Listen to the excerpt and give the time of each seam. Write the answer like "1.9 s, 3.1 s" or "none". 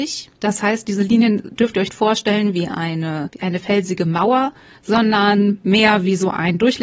1.9 s